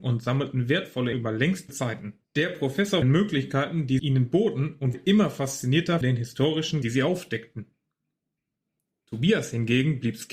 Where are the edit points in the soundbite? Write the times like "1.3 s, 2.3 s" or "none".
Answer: 1.1 s, 1.7 s, 2.2 s, 3.0 s, 4.0 s, 4.9 s, 6.0 s, 6.8 s